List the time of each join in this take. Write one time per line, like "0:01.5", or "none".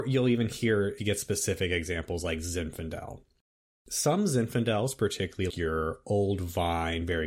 0:01.0
0:05.5